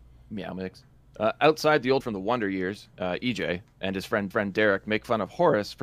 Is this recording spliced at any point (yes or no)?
yes